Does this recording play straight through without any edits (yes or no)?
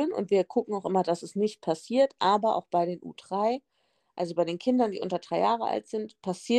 yes